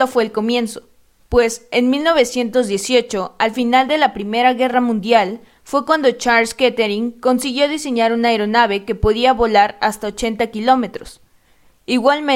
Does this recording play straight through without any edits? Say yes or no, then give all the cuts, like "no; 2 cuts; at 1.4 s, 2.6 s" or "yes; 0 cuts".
yes; 0 cuts